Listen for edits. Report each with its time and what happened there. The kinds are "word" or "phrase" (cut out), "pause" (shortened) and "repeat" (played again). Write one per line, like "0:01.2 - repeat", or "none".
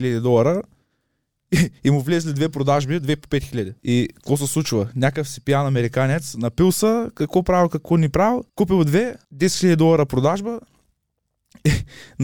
0:01.8 - pause
0:03.8 - pause
0:08.5 - pause
0:09.2 - pause